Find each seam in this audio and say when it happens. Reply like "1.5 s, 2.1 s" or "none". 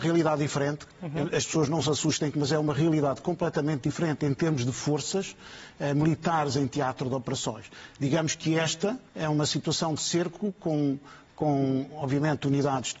2.3 s, 9.1 s

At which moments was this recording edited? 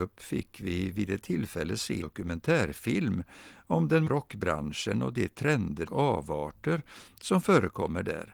2.0 s, 4.1 s, 5.9 s

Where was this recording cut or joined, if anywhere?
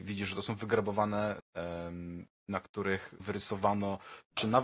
1.4 s, 2.3 s, 3.2 s

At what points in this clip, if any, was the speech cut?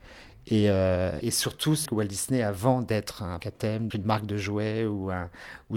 1.2 s, 1.8 s, 3.4 s, 3.9 s

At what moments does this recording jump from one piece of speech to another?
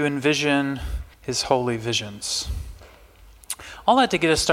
1.1 s

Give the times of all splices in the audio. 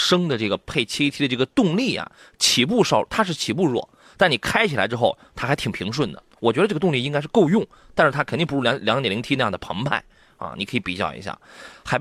none

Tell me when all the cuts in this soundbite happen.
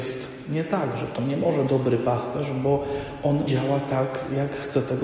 1.7 s, 3.5 s

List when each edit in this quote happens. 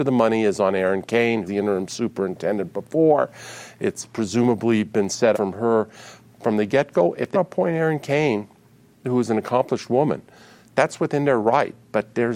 1.5 s, 5.3 s, 7.3 s

